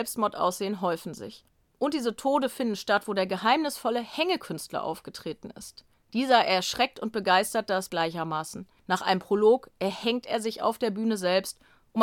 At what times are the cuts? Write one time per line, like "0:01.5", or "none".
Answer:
0:07.9